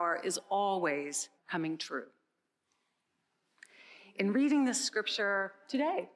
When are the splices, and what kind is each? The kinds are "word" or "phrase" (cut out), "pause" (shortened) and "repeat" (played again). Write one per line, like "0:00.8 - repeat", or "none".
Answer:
0:01.4 - pause